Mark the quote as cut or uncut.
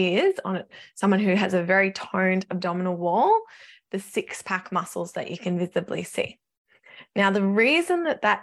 uncut